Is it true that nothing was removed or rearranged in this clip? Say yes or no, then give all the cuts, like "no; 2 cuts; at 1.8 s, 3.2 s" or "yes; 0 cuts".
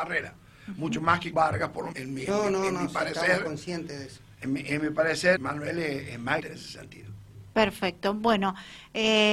no; 5 cuts; at 1.3 s, 1.9 s, 2.3 s, 5.4 s, 6.4 s